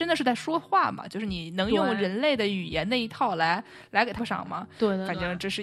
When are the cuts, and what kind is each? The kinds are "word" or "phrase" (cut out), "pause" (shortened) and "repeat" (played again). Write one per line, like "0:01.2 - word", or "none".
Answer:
0:04.2 - word